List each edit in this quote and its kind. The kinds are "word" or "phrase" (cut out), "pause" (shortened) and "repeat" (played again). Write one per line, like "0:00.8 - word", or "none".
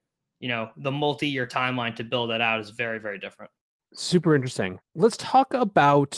0:03.8 - pause
0:04.9 - pause